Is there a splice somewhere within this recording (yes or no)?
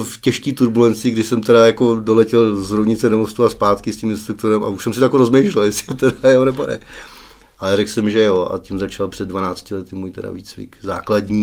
no